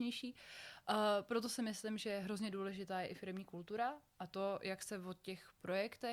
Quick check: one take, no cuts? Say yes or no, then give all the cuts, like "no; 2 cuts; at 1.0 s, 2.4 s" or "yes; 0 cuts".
yes; 0 cuts